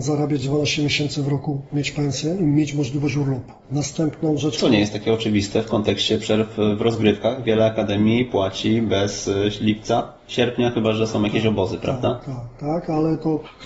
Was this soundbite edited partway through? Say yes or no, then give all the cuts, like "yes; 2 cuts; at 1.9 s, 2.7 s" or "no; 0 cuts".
yes; 1 cut; at 3.6 s